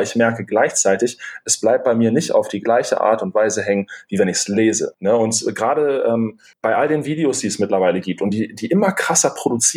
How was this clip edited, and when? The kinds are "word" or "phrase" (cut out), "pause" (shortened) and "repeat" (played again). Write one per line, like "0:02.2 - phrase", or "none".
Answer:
none